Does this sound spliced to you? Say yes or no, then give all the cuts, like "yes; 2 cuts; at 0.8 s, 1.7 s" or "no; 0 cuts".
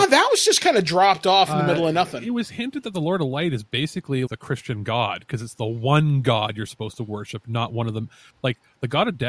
yes; 1 cut; at 4.3 s